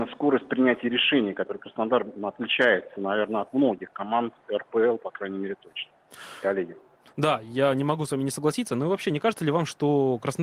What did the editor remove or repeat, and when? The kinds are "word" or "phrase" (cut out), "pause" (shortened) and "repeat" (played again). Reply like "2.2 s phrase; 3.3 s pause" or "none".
none